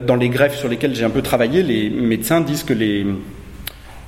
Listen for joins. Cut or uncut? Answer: uncut